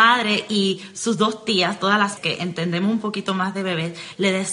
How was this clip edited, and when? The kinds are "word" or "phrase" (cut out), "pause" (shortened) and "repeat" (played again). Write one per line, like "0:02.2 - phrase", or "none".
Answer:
0:02.2 - word